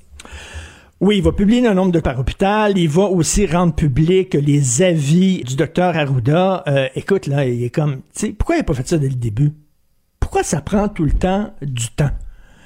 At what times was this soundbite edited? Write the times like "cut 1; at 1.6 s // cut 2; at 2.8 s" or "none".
cut 1; at 2.0 s // cut 2; at 5.4 s